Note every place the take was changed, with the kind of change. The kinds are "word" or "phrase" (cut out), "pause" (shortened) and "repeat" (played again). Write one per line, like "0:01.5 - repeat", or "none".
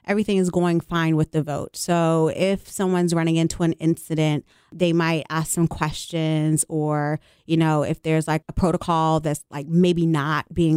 0:08.4 - word